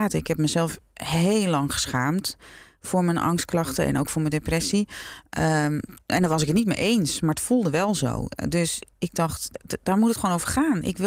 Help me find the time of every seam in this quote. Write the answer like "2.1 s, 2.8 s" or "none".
6.0 s, 8.9 s